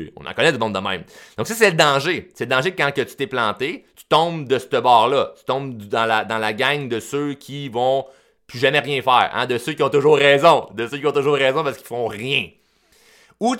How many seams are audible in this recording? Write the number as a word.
zero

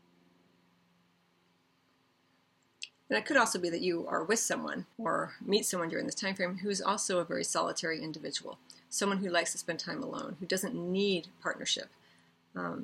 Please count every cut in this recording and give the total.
one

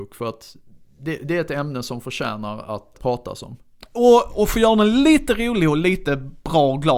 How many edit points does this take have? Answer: one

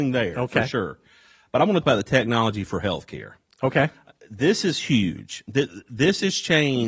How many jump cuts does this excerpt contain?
one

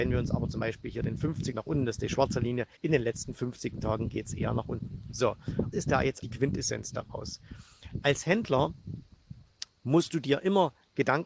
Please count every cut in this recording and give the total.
four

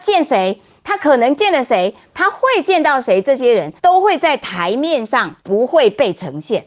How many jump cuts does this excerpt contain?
two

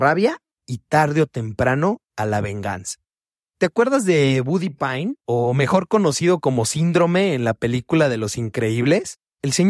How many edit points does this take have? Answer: zero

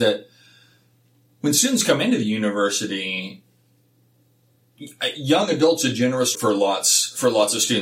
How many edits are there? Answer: one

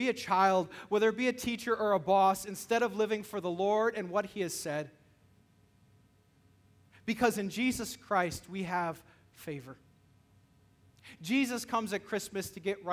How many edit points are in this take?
zero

